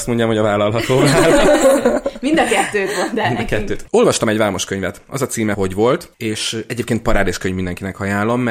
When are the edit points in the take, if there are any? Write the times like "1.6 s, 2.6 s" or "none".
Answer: 5.5 s